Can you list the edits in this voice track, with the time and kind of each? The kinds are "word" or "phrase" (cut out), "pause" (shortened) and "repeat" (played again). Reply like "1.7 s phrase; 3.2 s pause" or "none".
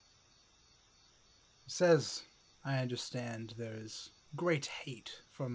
2.4 s pause